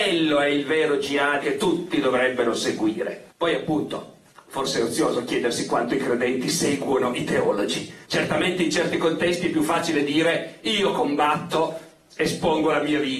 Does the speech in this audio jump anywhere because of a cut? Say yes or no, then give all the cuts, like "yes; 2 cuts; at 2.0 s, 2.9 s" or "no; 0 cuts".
yes; 4 cuts; at 1.4 s, 3.3 s, 4.3 s, 8.0 s